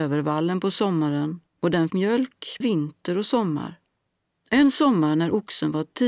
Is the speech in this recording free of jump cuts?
no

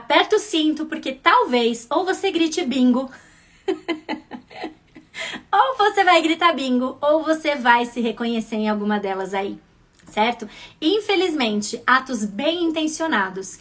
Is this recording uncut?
yes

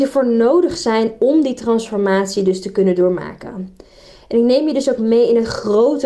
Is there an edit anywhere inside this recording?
no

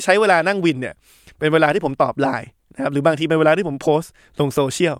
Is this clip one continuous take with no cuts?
yes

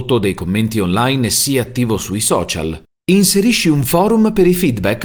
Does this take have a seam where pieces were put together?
no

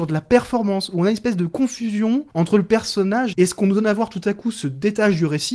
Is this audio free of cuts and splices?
no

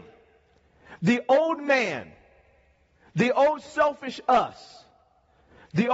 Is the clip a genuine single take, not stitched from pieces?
yes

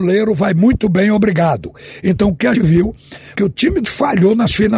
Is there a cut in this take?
yes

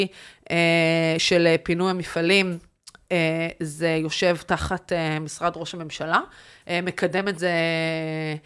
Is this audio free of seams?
yes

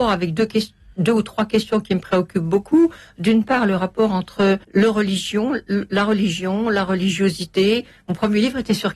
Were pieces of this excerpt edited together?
yes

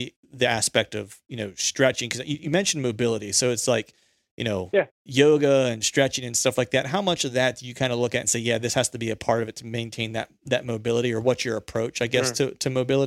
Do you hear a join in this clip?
no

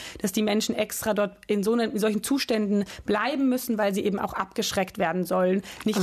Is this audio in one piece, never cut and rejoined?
yes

